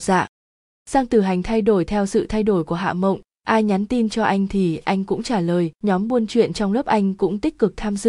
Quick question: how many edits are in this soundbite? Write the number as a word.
one